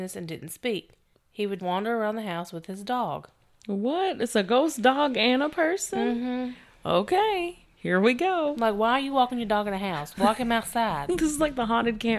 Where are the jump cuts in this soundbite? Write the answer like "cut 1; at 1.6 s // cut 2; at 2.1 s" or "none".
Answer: cut 1; at 1.1 s // cut 2; at 1.6 s